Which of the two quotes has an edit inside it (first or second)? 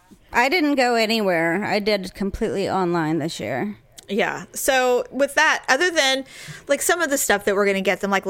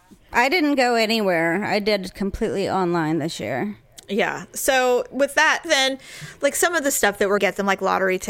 second